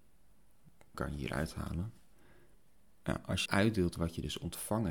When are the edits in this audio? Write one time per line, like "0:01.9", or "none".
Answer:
0:00.9
0:03.5